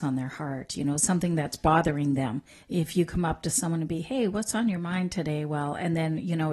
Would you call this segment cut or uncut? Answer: cut